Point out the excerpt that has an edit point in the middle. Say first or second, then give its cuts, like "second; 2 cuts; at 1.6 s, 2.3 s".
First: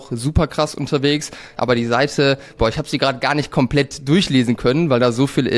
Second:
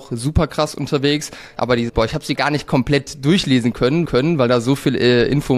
second; 3 cuts; at 1.9 s, 2.4 s, 4.1 s